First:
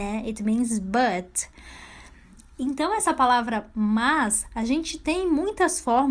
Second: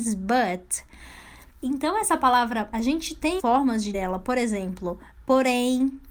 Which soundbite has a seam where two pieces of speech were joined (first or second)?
second